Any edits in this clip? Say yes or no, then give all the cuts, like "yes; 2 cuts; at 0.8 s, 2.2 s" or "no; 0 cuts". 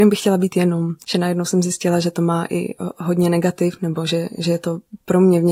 yes; 1 cut; at 1.0 s